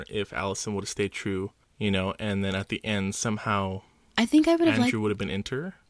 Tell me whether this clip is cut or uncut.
uncut